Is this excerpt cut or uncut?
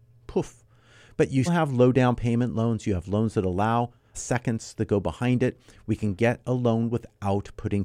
cut